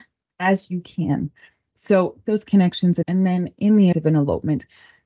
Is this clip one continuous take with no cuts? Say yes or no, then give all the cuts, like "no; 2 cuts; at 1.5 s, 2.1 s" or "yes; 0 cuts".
no; 3 cuts; at 2.3 s, 3.0 s, 3.9 s